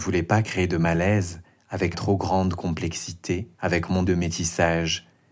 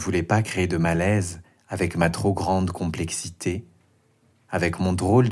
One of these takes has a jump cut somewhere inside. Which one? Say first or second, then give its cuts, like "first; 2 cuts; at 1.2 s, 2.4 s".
first; 3 cuts; at 1.9 s, 3.5 s, 4.1 s